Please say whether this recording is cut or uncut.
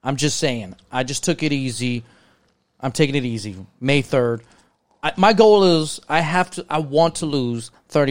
uncut